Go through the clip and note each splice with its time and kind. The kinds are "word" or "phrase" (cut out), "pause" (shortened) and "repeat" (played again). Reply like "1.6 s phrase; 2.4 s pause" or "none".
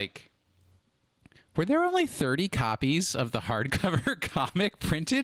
none